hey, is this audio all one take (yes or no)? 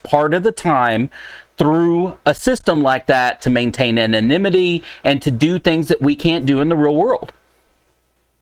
yes